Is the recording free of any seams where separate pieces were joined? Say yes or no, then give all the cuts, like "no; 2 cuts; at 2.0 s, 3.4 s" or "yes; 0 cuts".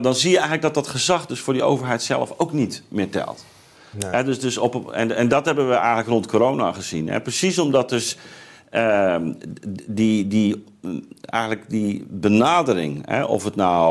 yes; 0 cuts